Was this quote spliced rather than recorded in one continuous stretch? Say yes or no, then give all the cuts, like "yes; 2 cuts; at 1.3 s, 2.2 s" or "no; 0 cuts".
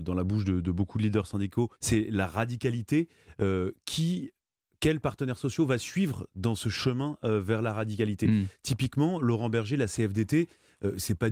yes; 1 cut; at 1.8 s